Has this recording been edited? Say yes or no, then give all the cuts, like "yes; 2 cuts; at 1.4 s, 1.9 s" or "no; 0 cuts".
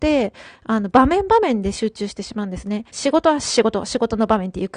yes; 1 cut; at 2.9 s